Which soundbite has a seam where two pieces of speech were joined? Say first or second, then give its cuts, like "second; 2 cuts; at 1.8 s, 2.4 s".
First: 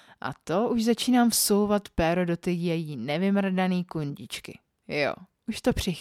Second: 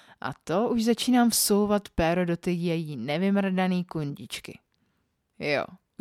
first; 1 cut; at 4.7 s